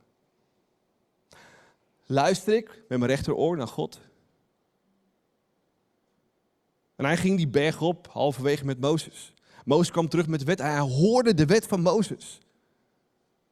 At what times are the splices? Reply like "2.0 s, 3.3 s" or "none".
none